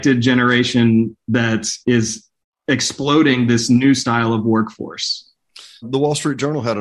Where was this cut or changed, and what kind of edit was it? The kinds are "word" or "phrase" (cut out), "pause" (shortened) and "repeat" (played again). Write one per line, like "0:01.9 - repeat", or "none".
0:01.8 - pause
0:05.8 - word